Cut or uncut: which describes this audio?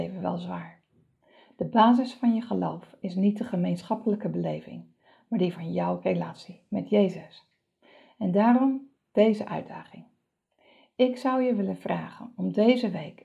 uncut